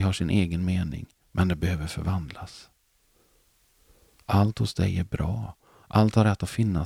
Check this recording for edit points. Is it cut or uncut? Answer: uncut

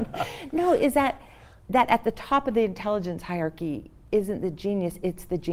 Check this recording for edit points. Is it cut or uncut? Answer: uncut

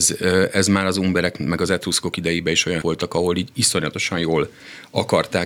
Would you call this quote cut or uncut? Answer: cut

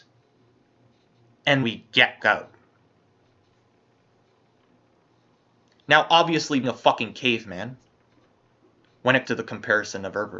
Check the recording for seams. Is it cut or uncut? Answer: cut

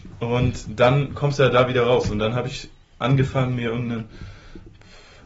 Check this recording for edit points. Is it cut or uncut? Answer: uncut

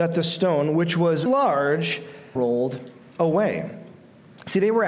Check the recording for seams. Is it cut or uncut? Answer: cut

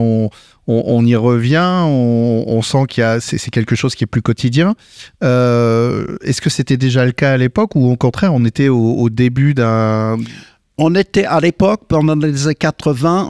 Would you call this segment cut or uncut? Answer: uncut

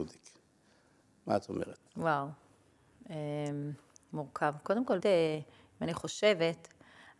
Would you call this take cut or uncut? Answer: cut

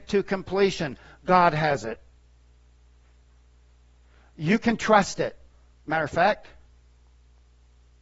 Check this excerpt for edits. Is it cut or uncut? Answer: uncut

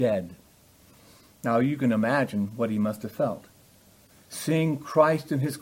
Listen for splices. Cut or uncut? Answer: uncut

